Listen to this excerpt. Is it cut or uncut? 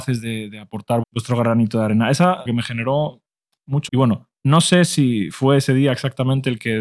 cut